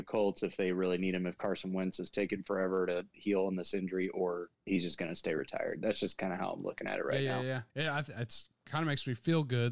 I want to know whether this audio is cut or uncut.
cut